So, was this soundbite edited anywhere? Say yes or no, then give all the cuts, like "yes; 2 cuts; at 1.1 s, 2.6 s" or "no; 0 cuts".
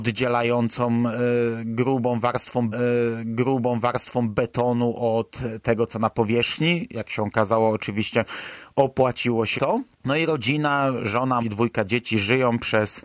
yes; 4 cuts; at 2.7 s, 9.6 s, 9.9 s, 11.4 s